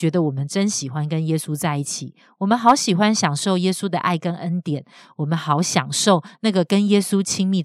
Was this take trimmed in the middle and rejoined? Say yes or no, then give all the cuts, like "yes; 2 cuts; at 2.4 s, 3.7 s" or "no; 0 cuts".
no; 0 cuts